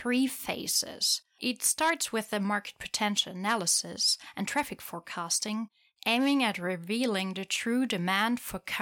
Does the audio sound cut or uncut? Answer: uncut